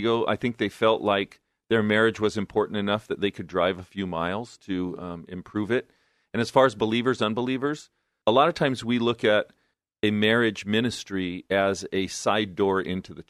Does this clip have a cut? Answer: no; 0 cuts

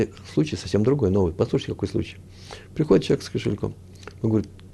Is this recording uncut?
yes; 0 cuts

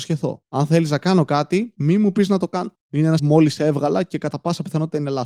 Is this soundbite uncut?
no; 1 cut; at 3.2 s

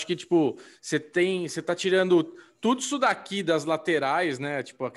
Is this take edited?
no; 0 cuts

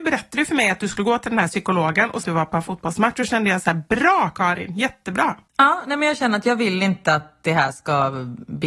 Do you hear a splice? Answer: yes; 2 cuts; at 2.2 s, 5.5 s

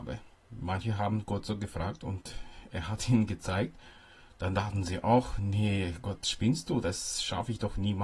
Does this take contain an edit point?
no; 0 cuts

